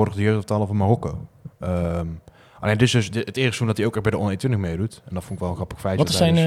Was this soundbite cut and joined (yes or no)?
no